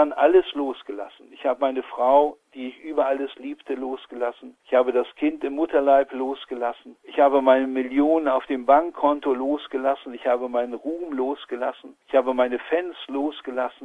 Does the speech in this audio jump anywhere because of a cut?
yes; 3 cuts; at 4.6 s, 7.0 s, 12.0 s

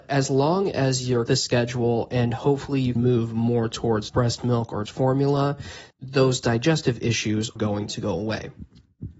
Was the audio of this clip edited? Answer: yes; 6 cuts; at 1.3 s, 3.0 s, 4.1 s, 4.9 s, 5.9 s, 7.6 s

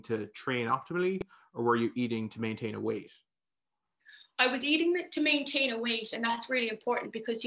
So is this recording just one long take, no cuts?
yes; 0 cuts

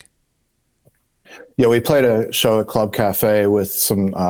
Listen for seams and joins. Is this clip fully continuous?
no; 1 cut; at 1.5 s

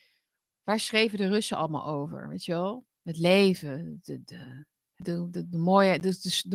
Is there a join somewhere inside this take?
yes; 1 cut; at 5.0 s

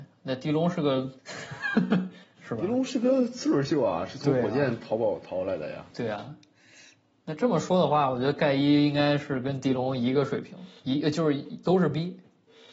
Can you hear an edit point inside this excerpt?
yes; 3 cuts; at 1.2 s, 2.2 s, 5.9 s

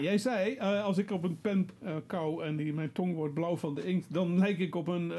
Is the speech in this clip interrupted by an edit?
no; 0 cuts

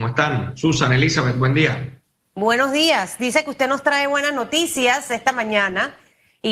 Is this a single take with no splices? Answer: yes; 0 cuts

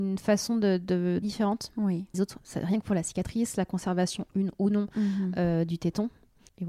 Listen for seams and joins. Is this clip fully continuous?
no; 2 cuts; at 1.2 s, 2.1 s

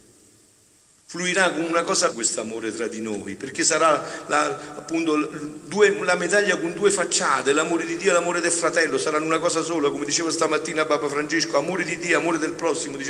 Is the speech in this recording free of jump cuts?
no; 1 cut; at 2.1 s

